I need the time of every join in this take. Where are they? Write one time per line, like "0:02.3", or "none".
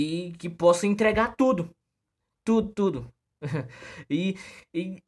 none